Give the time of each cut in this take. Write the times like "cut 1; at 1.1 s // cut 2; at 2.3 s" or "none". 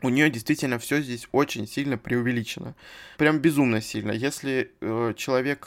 cut 1; at 3.1 s